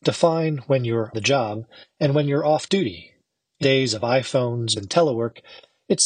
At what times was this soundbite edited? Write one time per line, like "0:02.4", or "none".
0:01.1
0:03.6
0:04.8